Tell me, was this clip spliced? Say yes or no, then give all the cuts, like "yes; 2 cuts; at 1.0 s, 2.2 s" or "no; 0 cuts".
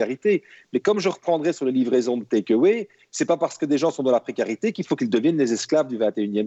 no; 0 cuts